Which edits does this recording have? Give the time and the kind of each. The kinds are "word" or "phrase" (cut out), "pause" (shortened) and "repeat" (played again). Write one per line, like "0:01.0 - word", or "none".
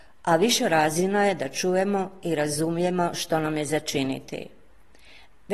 none